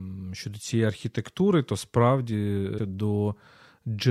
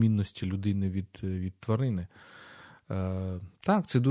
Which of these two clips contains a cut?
first; 1 cut; at 2.8 s

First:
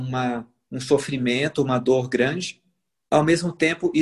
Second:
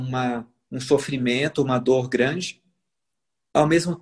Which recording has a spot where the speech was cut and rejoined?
first; 1 cut; at 2.9 s

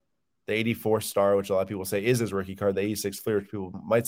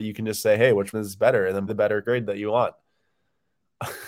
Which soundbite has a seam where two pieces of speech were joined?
second; 3 cuts; at 0.9 s, 1.7 s, 2.0 s

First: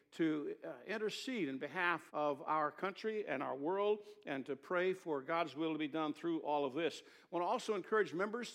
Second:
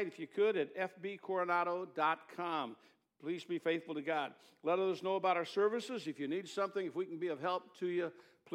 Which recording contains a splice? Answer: first; 1 cut; at 2.1 s

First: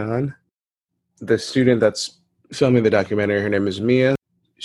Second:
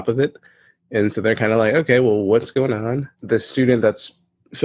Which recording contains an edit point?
second; 1 cut; at 3.1 s

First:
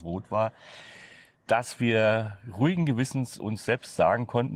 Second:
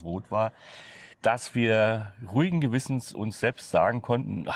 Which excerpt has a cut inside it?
second; 1 cut; at 1.1 s

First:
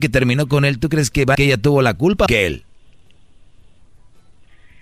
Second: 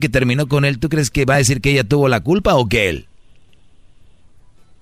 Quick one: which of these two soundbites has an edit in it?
first; 2 cuts; at 1.3 s, 2.3 s

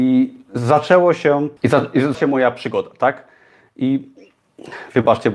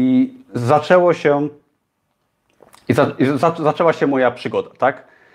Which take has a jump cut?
first; 2 cuts; at 1.6 s, 2.1 s

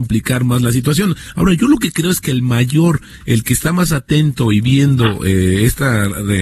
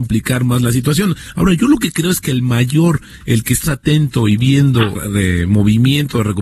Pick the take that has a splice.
second; 2 cuts; at 3.6 s, 4.9 s

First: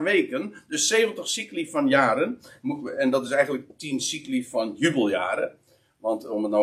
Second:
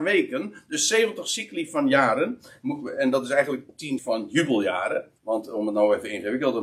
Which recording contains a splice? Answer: second; 2 cuts; at 4.0 s, 5.2 s

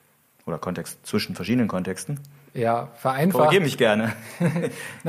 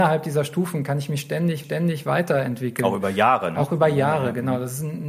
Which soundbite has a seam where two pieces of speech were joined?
second; 1 cut; at 1.6 s

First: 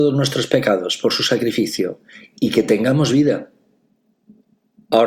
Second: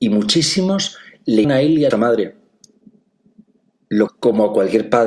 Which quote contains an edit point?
second; 3 cuts; at 1.4 s, 1.9 s, 4.1 s

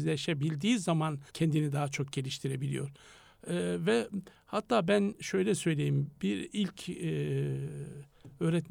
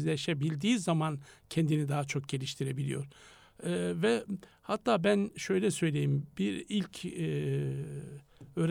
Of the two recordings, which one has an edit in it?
first; 1 cut; at 1.3 s

